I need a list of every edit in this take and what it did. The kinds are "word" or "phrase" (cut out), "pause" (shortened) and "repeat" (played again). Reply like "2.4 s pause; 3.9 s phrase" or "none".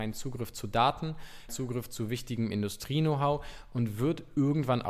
1.5 s word